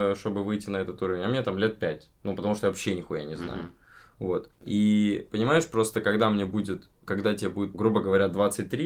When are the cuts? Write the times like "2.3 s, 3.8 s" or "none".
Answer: 2.1 s, 4.5 s, 7.1 s, 7.7 s